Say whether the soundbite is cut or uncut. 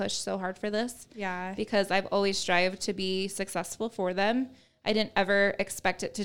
uncut